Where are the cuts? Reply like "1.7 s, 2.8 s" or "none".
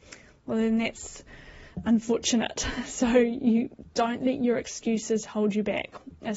none